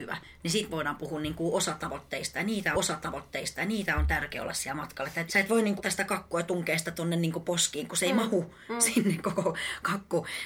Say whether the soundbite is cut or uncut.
cut